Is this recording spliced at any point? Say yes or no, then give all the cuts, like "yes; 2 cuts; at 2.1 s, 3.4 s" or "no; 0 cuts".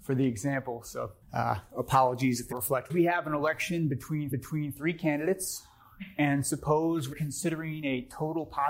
yes; 5 cuts; at 1.2 s, 2.5 s, 2.9 s, 4.3 s, 7.1 s